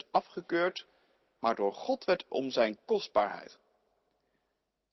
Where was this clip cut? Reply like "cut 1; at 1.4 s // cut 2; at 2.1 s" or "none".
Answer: cut 1; at 2.3 s

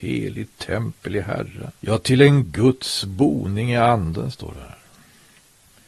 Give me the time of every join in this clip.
cut 1; at 1.8 s

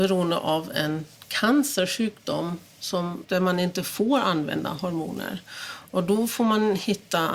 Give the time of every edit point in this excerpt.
cut 1; at 3.2 s

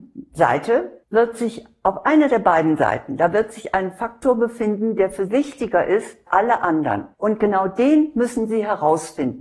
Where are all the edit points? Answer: cut 1; at 1.0 s // cut 2; at 5.3 s // cut 3; at 6.3 s // cut 4; at 7.1 s

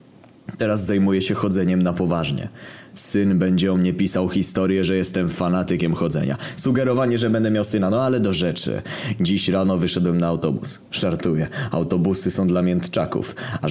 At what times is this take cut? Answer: none

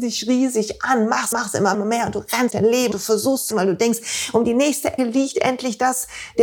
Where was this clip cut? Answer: cut 1; at 1.3 s // cut 2; at 1.7 s // cut 3; at 2.5 s // cut 4; at 2.9 s // cut 5; at 3.5 s // cut 6; at 5.0 s

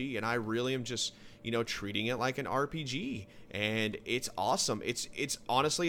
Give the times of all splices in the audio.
none

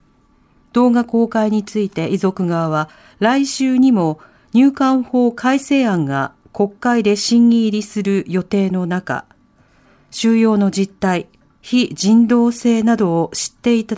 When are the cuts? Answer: none

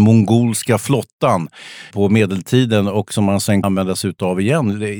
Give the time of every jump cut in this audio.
cut 1; at 1.9 s // cut 2; at 3.6 s

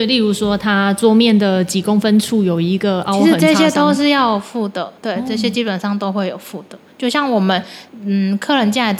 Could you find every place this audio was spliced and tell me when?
cut 1; at 5.0 s // cut 2; at 7.9 s

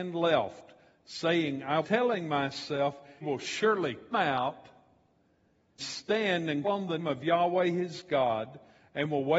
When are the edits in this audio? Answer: cut 1; at 1.8 s // cut 2; at 3.2 s // cut 3; at 4.1 s // cut 4; at 5.8 s // cut 5; at 6.6 s // cut 6; at 7.0 s

